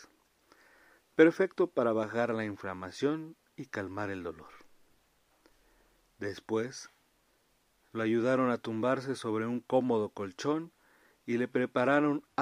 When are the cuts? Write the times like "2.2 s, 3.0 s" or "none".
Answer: none